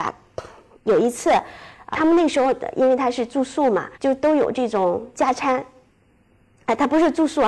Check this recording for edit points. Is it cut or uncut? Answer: cut